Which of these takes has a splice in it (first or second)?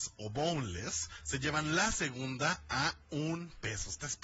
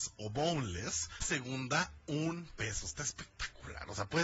second